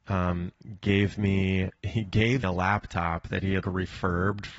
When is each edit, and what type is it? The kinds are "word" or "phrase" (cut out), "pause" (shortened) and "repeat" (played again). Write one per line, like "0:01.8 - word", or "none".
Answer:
0:01.8 - pause
0:02.4 - word
0:03.6 - word